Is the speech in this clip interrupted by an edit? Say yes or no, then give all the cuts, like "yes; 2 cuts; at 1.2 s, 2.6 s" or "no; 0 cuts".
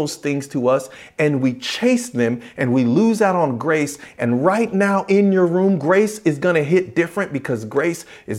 no; 0 cuts